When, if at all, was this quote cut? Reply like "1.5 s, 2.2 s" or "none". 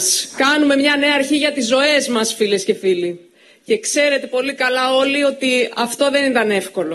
none

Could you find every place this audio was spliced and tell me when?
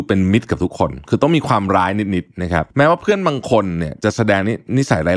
2.7 s

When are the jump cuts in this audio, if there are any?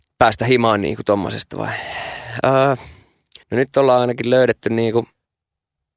3.4 s

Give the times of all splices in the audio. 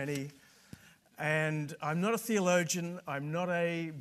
none

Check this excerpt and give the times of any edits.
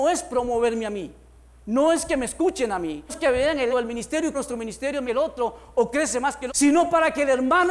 3.1 s, 3.7 s, 4.3 s, 5.0 s, 6.5 s

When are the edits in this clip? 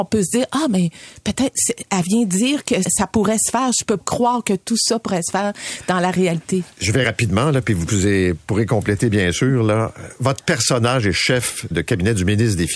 2.8 s, 4.0 s, 6.7 s, 7.0 s, 11.7 s

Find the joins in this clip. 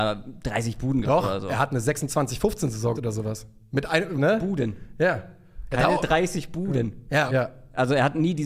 1.0 s, 2.9 s, 4.2 s, 7.3 s

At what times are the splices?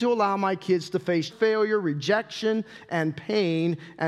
1.3 s

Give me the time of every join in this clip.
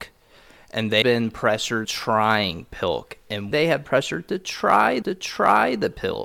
1.0 s, 1.8 s, 3.5 s, 3.8 s, 5.0 s

